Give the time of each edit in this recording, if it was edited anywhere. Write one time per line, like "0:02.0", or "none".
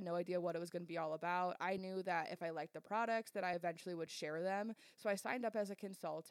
none